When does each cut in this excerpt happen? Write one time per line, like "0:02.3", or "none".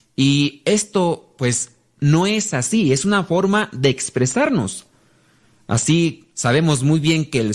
0:06.3